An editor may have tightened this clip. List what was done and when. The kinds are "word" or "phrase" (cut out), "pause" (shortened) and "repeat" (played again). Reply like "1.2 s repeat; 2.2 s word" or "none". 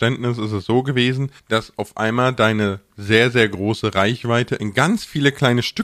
1.4 s pause